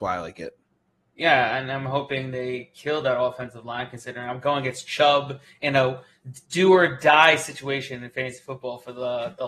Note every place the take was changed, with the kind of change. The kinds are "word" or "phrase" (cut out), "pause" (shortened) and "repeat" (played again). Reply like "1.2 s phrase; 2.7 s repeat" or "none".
6.4 s pause